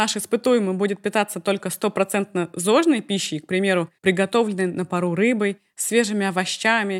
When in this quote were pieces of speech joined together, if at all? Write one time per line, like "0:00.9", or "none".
0:04.0